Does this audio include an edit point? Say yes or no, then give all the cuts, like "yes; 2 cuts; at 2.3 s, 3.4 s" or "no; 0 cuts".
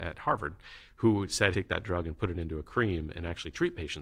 yes; 1 cut; at 1.5 s